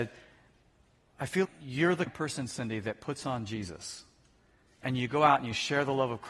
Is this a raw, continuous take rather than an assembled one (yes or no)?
no